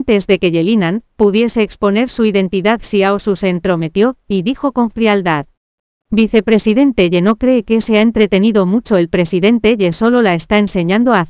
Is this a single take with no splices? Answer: yes; 0 cuts

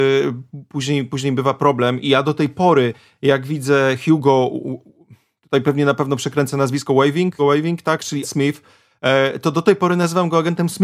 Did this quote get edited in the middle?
yes; 3 cuts; at 2.0 s, 7.4 s, 8.2 s

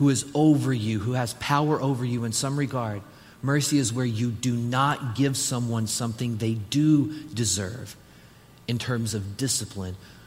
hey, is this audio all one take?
yes; 0 cuts

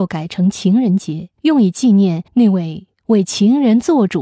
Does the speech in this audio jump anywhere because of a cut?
yes; 2 cuts; at 1.4 s, 2.3 s

